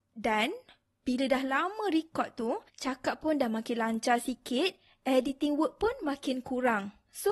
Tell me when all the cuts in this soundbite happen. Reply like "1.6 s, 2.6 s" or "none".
2.7 s